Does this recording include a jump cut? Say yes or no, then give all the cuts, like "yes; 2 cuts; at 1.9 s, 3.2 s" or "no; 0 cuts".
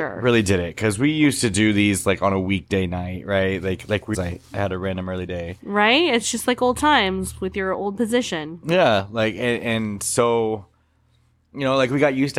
yes; 1 cut; at 4.1 s